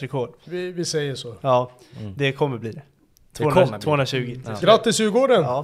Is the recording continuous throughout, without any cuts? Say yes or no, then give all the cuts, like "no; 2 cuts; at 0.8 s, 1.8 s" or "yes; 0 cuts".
yes; 0 cuts